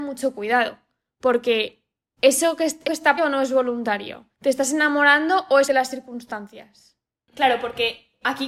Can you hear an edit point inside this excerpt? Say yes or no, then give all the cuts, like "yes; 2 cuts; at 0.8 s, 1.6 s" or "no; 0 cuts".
yes; 3 cuts; at 2.9 s, 3.2 s, 5.7 s